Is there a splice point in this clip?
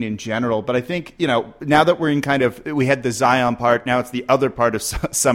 no; 0 cuts

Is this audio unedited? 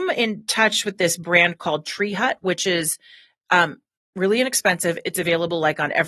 yes; 0 cuts

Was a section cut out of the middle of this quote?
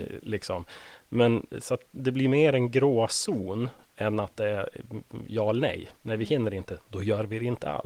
no; 0 cuts

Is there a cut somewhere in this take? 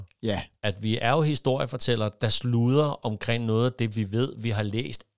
no; 0 cuts

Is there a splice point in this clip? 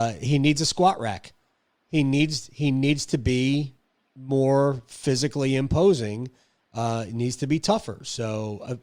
no; 0 cuts

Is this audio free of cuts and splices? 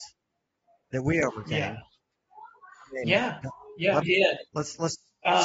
no; 1 cut; at 4.0 s

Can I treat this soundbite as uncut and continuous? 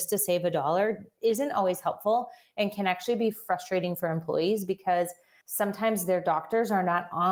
yes; 0 cuts

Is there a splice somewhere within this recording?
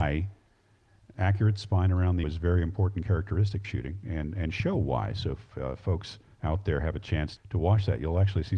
yes; 3 cuts; at 2.2 s, 3.6 s, 7.4 s

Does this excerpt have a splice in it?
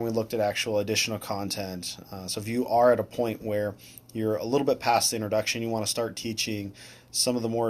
no; 0 cuts

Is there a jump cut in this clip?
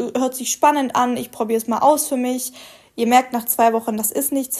no; 0 cuts

